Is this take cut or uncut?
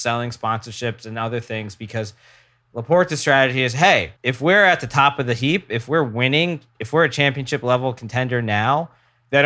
cut